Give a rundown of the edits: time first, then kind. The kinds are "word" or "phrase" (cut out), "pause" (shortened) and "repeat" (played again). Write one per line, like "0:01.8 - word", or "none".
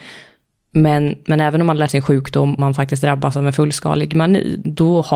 0:01.9 - word
0:02.6 - word

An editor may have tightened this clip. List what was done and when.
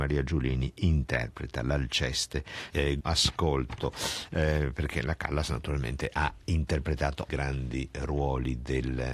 0:02.7 - word
0:03.0 - phrase
0:07.3 - phrase

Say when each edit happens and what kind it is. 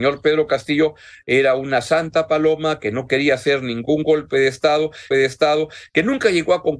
0:05.1 - repeat

